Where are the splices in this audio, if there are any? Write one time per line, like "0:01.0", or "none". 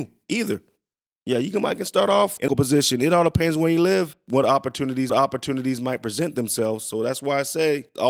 0:02.5
0:05.1